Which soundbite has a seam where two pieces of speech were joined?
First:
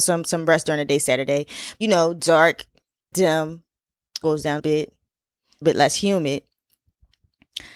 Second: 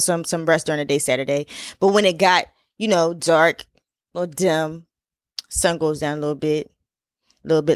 first; 5 cuts; at 1.8 s, 3.1 s, 4.2 s, 4.6 s, 5.6 s

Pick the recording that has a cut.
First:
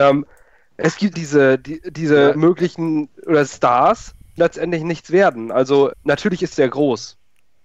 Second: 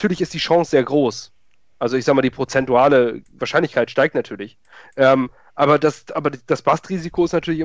first; 6 cuts; at 1.1 s, 2.3 s, 3.5 s, 4.4 s, 5.9 s, 6.5 s

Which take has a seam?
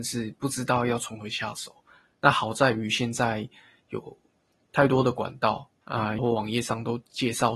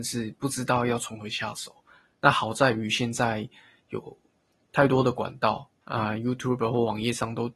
first; 1 cut; at 6.2 s

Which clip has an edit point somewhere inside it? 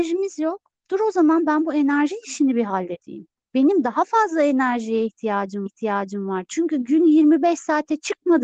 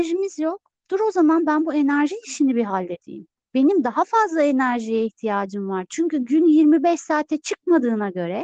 first; 1 cut; at 5.7 s

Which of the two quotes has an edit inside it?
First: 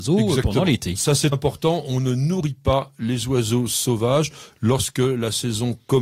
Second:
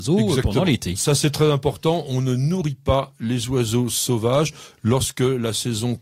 first; 1 cut; at 1.3 s

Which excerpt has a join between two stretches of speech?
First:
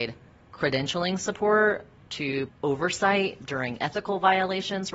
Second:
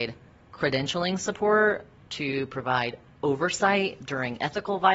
first; 1 cut; at 2.5 s

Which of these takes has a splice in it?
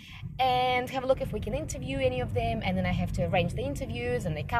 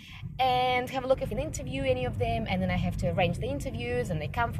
second; 1 cut; at 1.3 s

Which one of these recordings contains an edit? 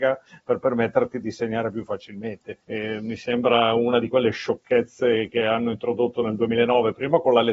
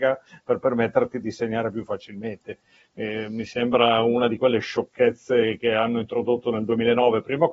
first; 1 cut; at 2.6 s

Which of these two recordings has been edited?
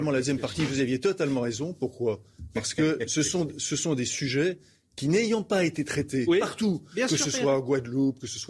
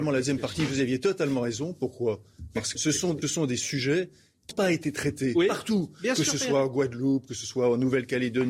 second; 3 cuts; at 2.7 s, 3.2 s, 4.5 s

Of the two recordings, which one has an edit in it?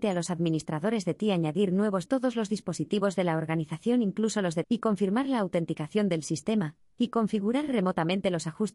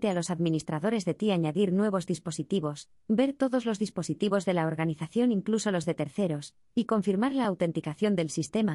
first; 2 cuts; at 2.1 s, 4.6 s

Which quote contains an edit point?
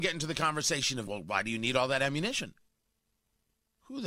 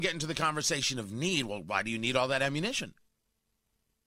first; 1 cut; at 1.1 s

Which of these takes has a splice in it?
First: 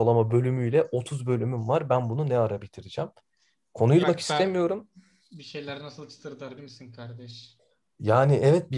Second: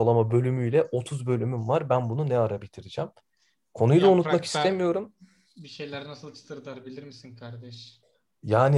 first; 2 cuts; at 4.0 s, 6.6 s

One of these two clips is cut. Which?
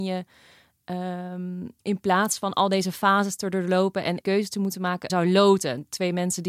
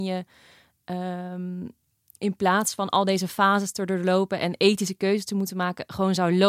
first; 3 cuts; at 1.8 s, 4.2 s, 5.1 s

